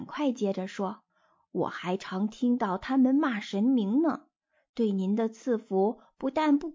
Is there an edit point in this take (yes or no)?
yes